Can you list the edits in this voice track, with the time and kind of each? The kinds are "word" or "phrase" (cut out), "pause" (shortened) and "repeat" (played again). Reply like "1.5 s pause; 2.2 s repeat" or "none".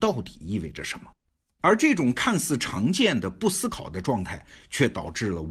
none